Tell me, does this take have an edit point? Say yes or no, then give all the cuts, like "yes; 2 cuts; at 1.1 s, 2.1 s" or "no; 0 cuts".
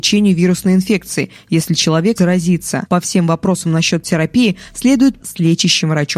yes; 2 cuts; at 2.2 s, 5.2 s